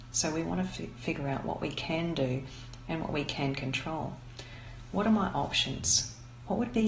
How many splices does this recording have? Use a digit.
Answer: 0